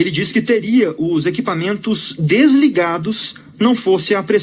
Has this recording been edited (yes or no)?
no